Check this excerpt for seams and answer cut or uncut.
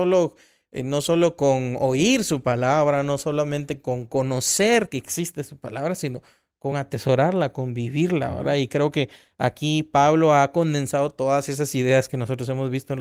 uncut